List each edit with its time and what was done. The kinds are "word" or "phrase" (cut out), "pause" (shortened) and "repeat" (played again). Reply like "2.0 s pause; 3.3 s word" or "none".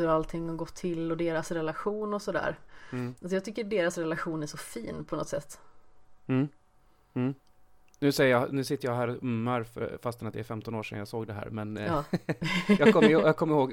none